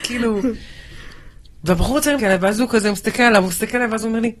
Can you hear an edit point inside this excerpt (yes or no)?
yes